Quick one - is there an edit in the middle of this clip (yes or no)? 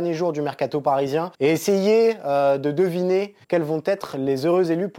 yes